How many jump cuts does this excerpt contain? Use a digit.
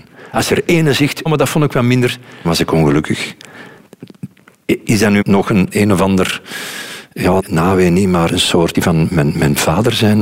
8